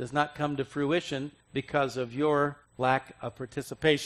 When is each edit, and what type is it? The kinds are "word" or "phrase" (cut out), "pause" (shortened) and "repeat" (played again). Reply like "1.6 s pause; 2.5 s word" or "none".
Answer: 1.4 s pause; 2.7 s pause